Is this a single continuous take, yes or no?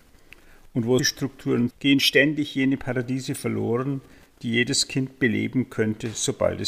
no